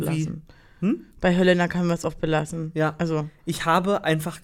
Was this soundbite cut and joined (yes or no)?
no